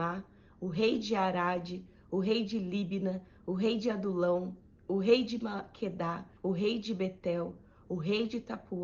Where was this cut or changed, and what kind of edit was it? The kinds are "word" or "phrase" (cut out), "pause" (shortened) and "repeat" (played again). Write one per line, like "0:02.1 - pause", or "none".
0:06.4 - pause